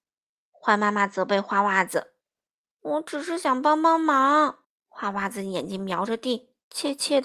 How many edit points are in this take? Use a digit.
2